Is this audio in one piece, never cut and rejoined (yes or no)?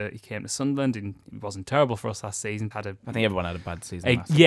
no